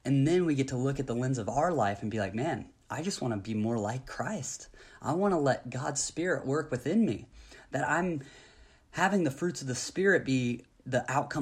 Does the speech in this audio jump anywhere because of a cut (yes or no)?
no